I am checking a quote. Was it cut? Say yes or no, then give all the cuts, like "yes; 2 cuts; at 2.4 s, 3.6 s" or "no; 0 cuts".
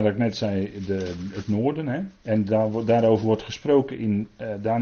yes; 1 cut; at 2.2 s